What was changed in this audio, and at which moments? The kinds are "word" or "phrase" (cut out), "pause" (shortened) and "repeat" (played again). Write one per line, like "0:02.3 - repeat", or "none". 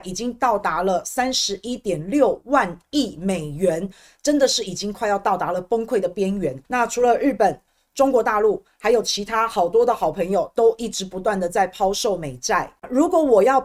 0:06.6 - pause